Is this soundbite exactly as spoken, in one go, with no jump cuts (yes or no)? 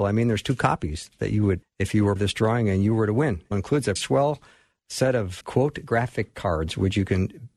no